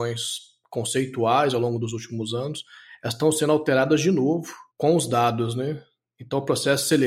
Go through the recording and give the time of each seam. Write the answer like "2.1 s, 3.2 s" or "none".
4.7 s